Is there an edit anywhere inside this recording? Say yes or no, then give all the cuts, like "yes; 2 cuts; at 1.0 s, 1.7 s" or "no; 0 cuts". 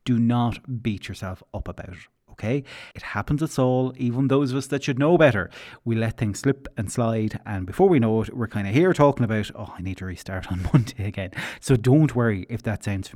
yes; 1 cut; at 2.9 s